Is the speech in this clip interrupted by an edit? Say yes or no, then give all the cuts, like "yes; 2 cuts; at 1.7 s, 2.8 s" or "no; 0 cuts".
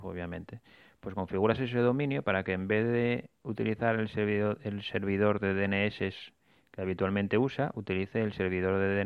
no; 0 cuts